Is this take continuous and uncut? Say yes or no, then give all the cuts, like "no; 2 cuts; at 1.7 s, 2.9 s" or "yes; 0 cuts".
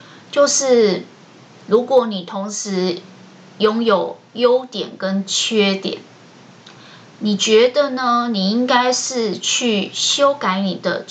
yes; 0 cuts